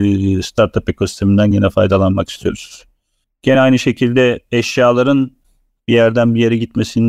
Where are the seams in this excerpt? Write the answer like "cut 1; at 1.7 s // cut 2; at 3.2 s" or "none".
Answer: none